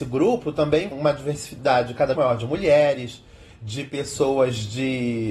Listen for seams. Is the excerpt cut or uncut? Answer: cut